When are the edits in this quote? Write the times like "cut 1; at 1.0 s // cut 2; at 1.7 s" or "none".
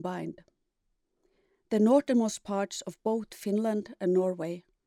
none

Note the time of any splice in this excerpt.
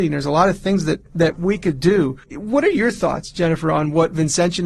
cut 1; at 2.2 s

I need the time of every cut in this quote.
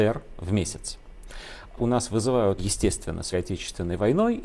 cut 1; at 1.8 s // cut 2; at 2.6 s // cut 3; at 3.3 s

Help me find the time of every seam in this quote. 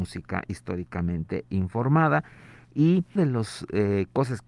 cut 1; at 3.2 s

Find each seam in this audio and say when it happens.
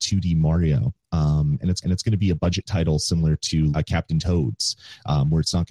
cut 1; at 1.8 s // cut 2; at 3.7 s

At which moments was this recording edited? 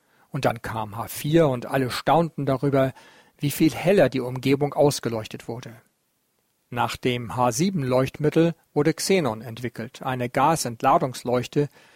none

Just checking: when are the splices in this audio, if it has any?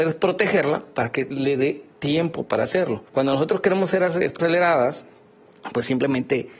cut 1; at 3.1 s // cut 2; at 4.4 s

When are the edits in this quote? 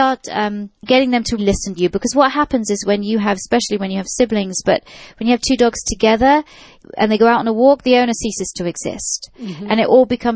cut 1; at 1.4 s // cut 2; at 1.8 s

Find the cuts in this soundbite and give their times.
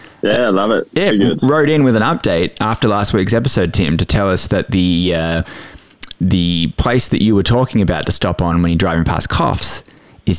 cut 1; at 1.1 s

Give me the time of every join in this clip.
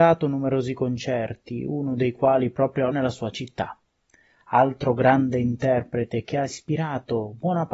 cut 1; at 2.9 s

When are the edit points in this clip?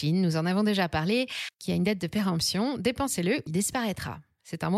cut 1; at 1.5 s // cut 2; at 3.5 s

